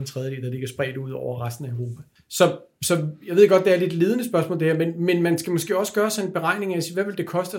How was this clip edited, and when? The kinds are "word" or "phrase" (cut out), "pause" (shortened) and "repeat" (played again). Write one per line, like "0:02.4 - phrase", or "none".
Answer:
0:02.2 - pause